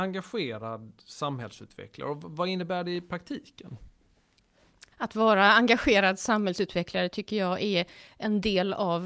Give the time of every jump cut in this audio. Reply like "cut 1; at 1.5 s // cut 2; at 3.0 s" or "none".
cut 1; at 4.9 s